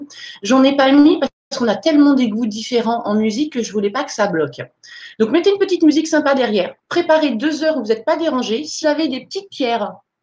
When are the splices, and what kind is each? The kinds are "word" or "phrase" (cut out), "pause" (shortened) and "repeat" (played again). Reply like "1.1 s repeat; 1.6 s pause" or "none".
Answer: 6.8 s pause; 8.8 s word